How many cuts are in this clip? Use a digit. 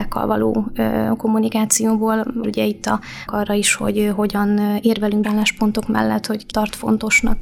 4